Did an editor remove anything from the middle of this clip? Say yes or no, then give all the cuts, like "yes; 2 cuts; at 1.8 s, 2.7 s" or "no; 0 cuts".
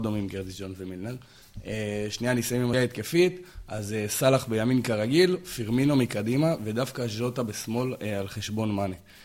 yes; 1 cut; at 2.7 s